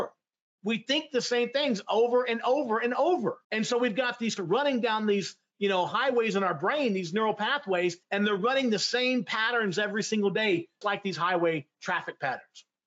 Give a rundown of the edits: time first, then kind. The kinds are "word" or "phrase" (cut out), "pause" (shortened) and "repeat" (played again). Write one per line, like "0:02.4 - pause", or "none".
0:03.4 - pause
0:04.4 - word
0:08.0 - pause
0:10.8 - word